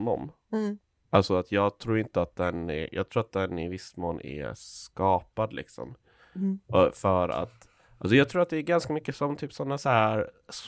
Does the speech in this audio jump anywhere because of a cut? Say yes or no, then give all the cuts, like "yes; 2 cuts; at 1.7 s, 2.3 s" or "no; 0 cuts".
no; 0 cuts